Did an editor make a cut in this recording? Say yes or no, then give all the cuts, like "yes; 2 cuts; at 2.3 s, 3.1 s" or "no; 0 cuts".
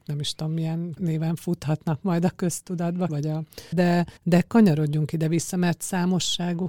yes; 4 cuts; at 1.0 s, 3.1 s, 3.7 s, 4.2 s